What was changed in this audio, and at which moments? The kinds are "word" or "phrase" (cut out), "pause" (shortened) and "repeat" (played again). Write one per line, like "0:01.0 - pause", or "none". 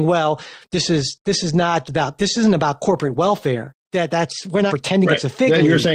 0:01.8 - word
0:03.8 - pause
0:04.7 - word